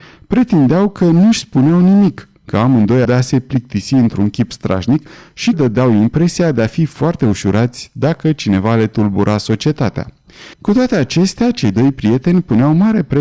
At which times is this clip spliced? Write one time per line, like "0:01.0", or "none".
0:03.0
0:05.5
0:10.5